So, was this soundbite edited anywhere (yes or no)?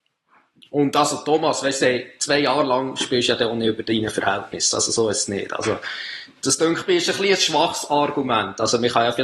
no